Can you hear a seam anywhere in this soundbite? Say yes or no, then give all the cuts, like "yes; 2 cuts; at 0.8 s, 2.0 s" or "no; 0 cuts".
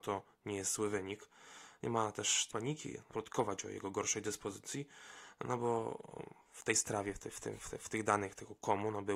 yes; 2 cuts; at 2.5 s, 3.1 s